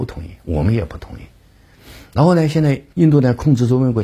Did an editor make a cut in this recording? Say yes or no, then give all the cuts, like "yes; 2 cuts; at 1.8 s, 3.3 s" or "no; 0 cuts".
yes; 1 cut; at 2.9 s